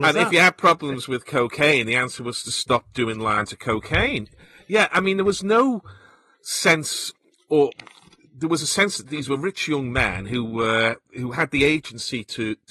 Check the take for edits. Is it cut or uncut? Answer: uncut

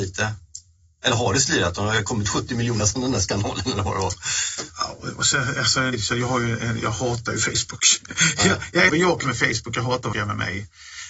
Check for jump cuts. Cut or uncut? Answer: cut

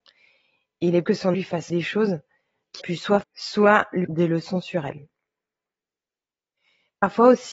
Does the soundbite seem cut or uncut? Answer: cut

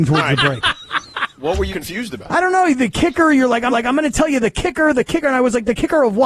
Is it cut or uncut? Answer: cut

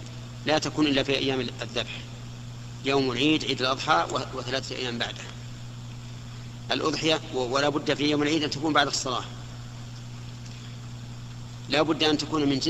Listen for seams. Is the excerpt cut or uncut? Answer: uncut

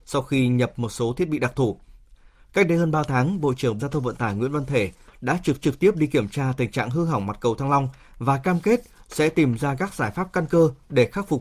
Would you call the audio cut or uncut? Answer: cut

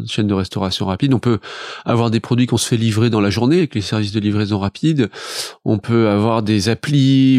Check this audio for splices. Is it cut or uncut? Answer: uncut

